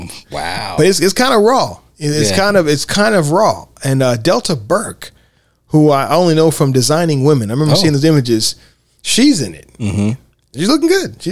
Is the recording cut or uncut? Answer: uncut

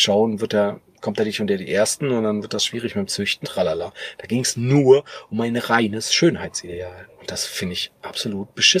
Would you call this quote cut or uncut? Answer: cut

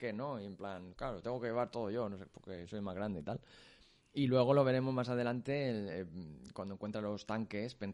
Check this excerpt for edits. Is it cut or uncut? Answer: uncut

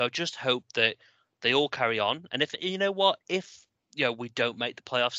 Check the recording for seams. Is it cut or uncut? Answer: uncut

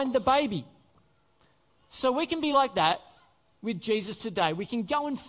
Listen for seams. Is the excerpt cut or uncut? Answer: uncut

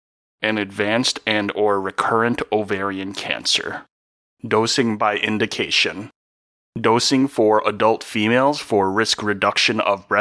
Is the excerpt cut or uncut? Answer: cut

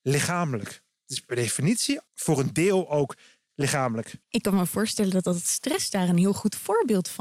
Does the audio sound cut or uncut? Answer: cut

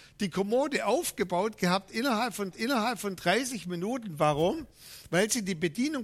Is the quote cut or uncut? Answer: cut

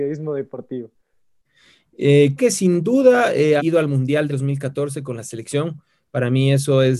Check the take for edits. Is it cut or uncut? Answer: cut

